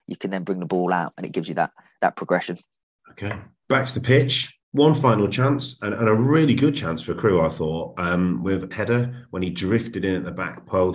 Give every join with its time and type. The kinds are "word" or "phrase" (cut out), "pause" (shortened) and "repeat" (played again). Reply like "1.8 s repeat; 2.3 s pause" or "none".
4.6 s pause; 8.7 s word